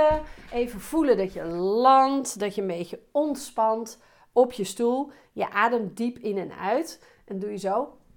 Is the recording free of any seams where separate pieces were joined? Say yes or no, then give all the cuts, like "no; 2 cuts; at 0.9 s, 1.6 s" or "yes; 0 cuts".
yes; 0 cuts